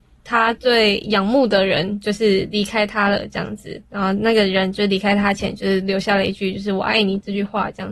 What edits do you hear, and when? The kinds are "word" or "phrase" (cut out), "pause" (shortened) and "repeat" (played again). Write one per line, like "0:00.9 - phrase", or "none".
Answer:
0:03.8 - pause